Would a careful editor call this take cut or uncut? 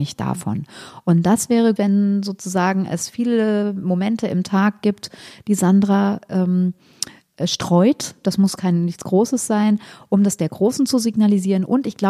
cut